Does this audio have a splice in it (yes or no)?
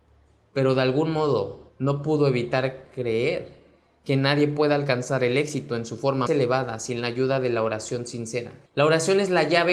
yes